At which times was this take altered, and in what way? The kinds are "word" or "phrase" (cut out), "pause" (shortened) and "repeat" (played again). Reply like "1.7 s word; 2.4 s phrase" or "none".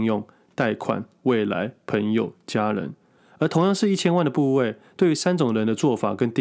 none